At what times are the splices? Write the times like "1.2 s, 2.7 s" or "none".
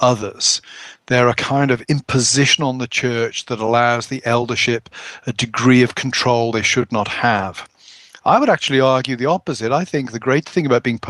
none